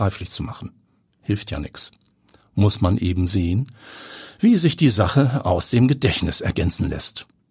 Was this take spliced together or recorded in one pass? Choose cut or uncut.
uncut